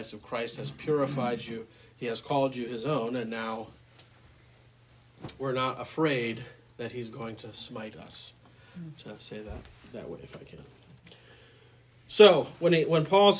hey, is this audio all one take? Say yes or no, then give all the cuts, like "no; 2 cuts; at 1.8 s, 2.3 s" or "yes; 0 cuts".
yes; 0 cuts